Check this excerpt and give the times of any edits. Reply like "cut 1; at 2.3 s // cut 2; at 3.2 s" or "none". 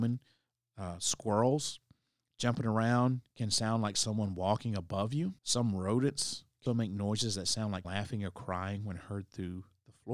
cut 1; at 5.4 s // cut 2; at 6.7 s // cut 3; at 7.8 s